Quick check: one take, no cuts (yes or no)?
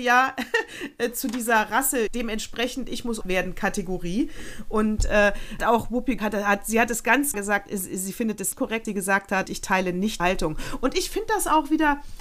no